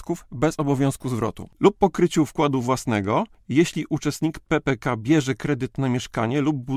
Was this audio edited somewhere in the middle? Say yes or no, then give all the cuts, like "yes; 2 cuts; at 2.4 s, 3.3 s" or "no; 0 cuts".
yes; 1 cut; at 1.5 s